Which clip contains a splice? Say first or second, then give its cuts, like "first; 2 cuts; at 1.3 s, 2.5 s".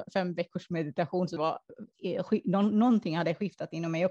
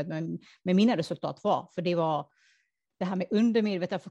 first; 1 cut; at 1.4 s